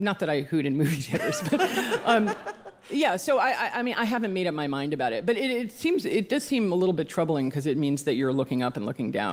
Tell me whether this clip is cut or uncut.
uncut